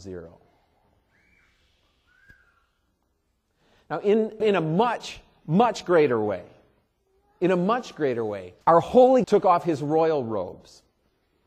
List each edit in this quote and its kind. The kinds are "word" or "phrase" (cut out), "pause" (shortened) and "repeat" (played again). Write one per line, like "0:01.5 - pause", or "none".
0:04.4 - phrase
0:08.6 - pause
0:09.2 - word